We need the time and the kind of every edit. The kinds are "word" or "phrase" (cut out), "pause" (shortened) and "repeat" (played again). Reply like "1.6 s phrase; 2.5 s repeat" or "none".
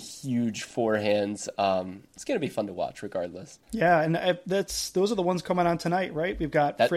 3.6 s pause